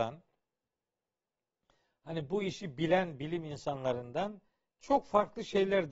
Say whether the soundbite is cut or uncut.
uncut